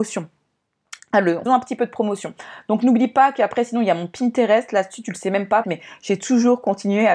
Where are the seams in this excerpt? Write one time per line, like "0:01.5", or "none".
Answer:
0:01.5
0:05.6

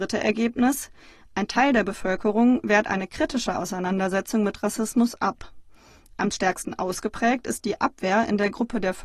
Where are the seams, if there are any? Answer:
none

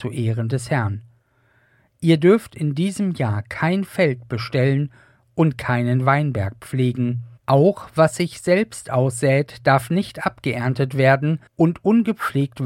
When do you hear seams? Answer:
0:07.4
0:11.5

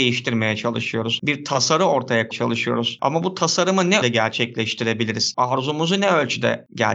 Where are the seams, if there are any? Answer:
0:02.3
0:04.0

